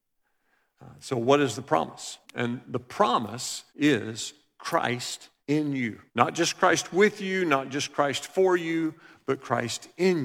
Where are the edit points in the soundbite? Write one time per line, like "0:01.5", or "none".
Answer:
0:02.2
0:03.7
0:05.4
0:06.1